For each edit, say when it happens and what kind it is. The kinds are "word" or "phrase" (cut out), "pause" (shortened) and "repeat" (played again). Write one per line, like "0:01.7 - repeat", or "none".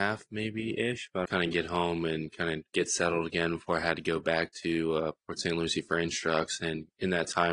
0:01.2 - phrase